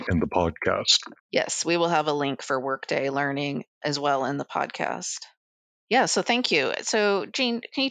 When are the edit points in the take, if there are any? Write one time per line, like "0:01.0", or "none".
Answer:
0:01.2